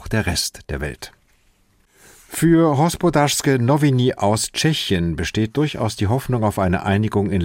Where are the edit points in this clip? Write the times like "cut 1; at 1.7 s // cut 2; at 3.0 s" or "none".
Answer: none